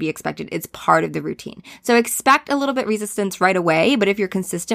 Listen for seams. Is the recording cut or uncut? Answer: uncut